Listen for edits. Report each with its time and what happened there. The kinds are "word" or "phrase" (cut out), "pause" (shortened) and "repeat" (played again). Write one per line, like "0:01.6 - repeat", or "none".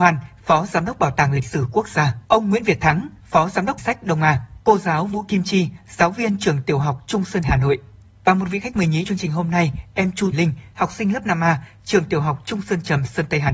0:02.2 - pause
0:03.8 - phrase
0:04.6 - pause
0:07.4 - phrase
0:09.1 - word
0:10.3 - word